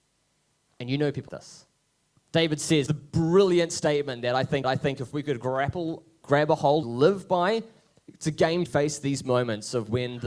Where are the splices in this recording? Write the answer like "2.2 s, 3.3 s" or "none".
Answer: 1.3 s, 2.9 s, 4.6 s, 6.2 s, 6.8 s, 8.7 s